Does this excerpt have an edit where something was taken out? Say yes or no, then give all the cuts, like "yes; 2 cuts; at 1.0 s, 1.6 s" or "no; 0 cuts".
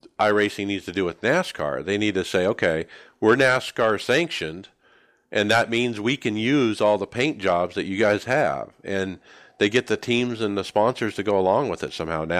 no; 0 cuts